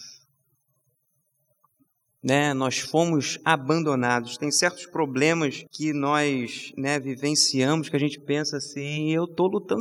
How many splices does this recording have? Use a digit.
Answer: 1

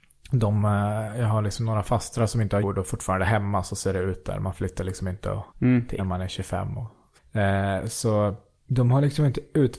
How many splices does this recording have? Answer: 4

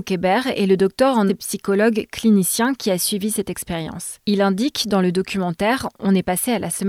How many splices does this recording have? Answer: 1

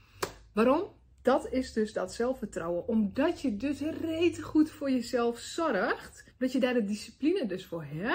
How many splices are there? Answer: 2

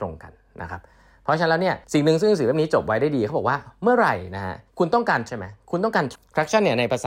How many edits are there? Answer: 4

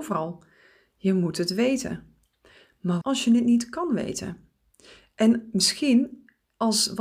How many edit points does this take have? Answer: 1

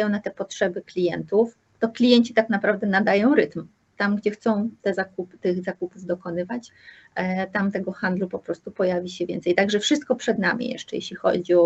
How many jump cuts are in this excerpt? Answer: 0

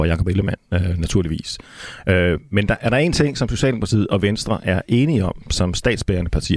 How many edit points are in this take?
0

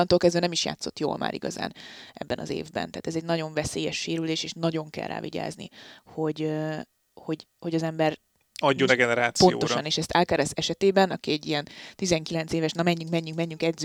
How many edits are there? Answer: 1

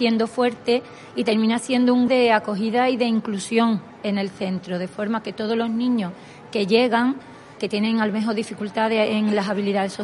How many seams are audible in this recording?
2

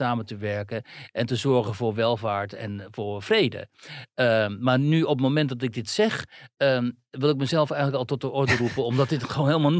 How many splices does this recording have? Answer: 0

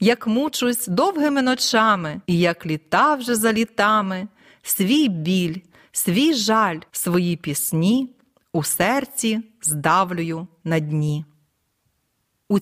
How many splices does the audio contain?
2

